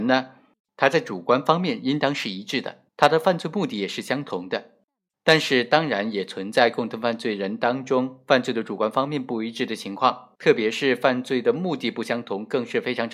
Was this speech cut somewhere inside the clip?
yes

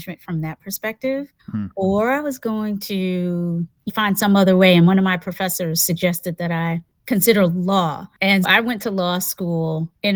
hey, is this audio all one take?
no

